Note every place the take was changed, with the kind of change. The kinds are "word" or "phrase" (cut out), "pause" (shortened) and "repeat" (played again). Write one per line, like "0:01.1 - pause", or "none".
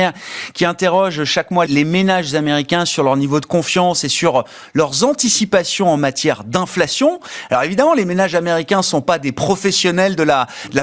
0:01.7 - word